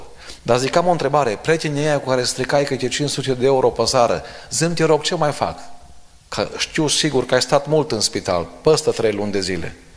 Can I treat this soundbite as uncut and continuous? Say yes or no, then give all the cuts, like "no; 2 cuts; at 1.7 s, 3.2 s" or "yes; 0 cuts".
yes; 0 cuts